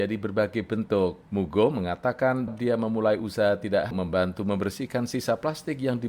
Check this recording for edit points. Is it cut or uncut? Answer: cut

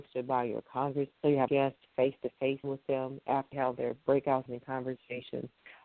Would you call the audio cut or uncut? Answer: cut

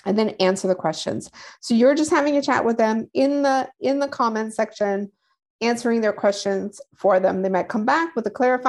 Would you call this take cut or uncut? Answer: uncut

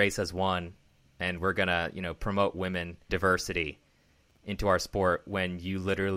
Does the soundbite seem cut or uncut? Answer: cut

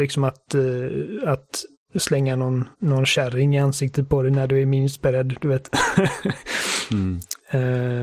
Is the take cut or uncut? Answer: cut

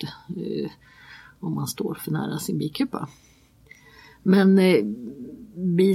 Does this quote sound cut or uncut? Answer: uncut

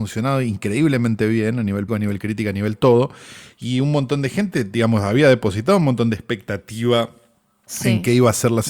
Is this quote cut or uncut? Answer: cut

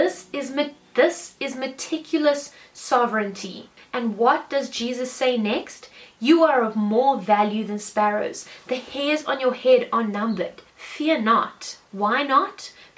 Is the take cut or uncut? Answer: cut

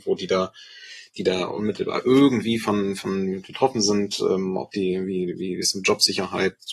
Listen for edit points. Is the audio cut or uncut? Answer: uncut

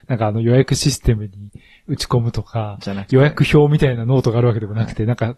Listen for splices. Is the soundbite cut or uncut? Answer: uncut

